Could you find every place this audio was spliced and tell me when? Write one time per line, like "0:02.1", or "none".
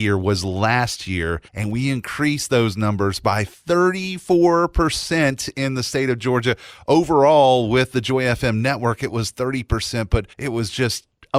0:01.5
0:10.3

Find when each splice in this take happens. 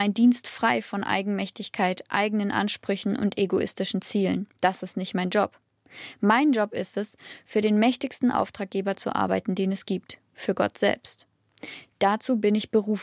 0:04.5

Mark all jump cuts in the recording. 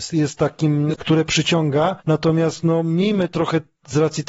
0:00.9
0:02.0

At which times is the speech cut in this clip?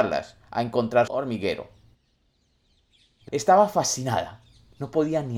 0:01.1
0:03.3

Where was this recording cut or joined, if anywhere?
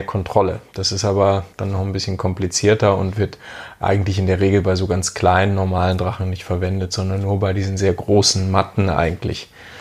0:01.5

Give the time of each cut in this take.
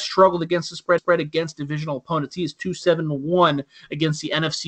0:01.0

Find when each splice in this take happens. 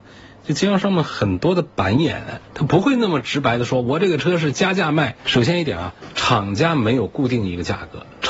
0:02.4

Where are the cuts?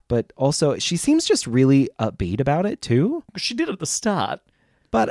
0:03.3

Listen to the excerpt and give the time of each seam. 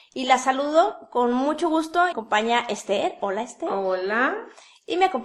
0:02.1

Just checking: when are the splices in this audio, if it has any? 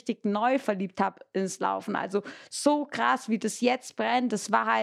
none

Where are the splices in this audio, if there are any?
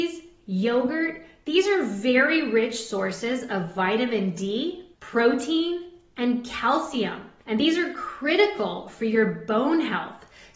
0:04.9
0:07.4

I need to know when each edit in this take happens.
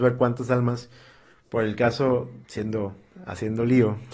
0:02.4

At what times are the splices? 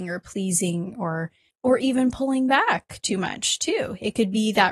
0:01.5

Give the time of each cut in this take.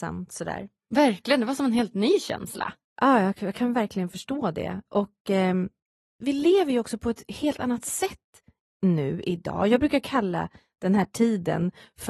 none

